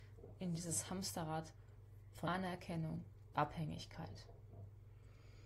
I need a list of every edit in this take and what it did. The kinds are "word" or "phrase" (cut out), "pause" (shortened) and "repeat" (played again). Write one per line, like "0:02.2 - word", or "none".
0:02.2 - word
0:03.3 - word